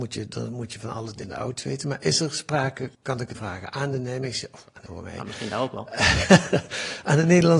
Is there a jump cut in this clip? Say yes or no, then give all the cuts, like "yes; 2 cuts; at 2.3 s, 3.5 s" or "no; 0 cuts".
yes; 4 cuts; at 1.2 s, 2.9 s, 3.3 s, 4.9 s